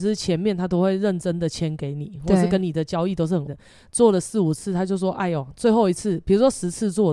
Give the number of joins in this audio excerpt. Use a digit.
1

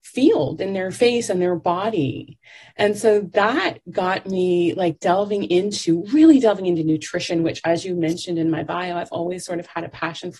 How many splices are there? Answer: 0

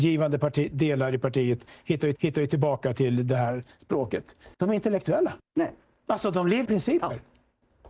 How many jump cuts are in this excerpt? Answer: 4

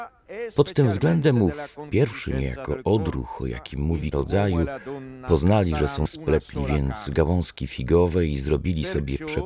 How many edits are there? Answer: 2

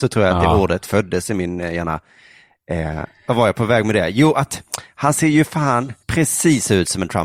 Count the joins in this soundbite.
1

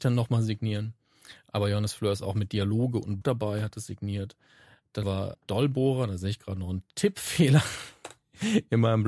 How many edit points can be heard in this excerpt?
3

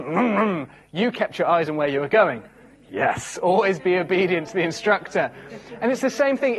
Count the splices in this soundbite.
0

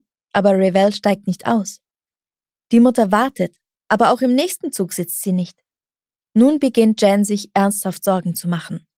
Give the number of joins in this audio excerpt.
0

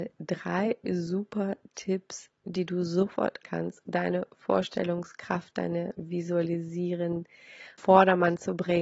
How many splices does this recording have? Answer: 3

